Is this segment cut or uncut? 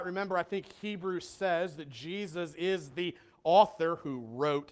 uncut